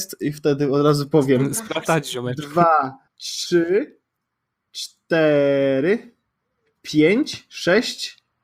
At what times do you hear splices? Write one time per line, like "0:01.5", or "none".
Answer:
0:01.9
0:03.1